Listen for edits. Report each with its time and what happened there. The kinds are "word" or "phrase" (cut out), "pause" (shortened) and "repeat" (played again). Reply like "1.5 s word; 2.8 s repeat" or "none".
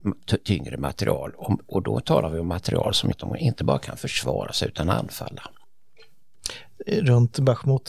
3.1 s word